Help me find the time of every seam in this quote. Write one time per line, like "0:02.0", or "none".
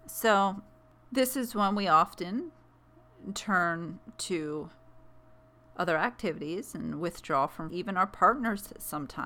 0:07.7